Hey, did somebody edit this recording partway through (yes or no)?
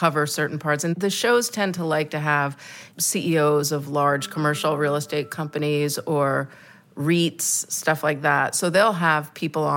no